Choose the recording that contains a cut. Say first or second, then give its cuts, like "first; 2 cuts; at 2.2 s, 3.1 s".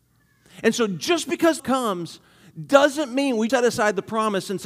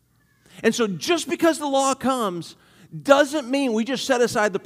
first; 2 cuts; at 1.6 s, 3.5 s